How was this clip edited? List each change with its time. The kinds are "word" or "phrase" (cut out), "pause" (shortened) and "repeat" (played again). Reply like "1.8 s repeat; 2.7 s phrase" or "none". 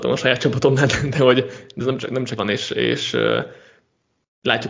1.8 s word; 2.4 s word

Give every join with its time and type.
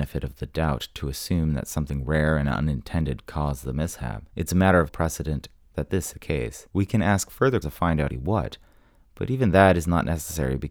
4.3 s pause; 4.9 s word; 5.6 s phrase; 6.1 s word; 6.7 s pause; 7.6 s word; 8.1 s word

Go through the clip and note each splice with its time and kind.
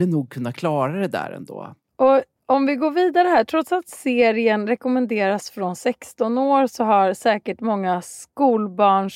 1.8 s pause

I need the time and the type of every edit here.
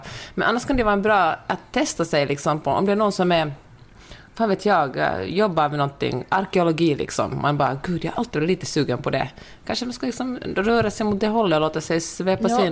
none

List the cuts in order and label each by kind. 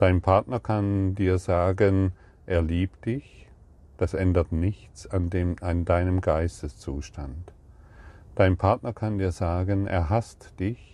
none

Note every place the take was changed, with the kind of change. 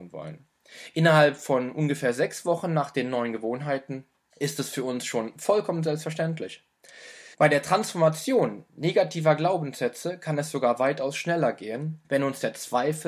7.3 s pause; 12.0 s pause

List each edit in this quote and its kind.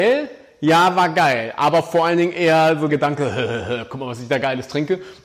2.9 s word

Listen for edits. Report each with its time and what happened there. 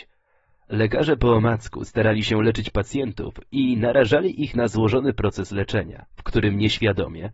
6.1 s pause

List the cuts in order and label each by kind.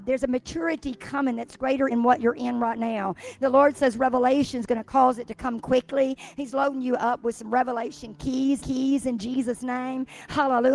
1.9 s word; 8.6 s repeat

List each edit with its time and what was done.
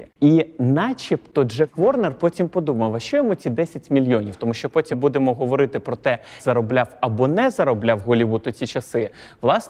4.9 s word; 6.4 s word

